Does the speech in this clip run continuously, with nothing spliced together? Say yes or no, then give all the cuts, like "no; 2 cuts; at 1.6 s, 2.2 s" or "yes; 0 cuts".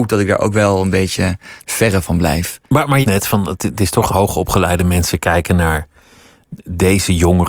no; 4 cuts; at 1.6 s, 2.6 s, 3.0 s, 4.1 s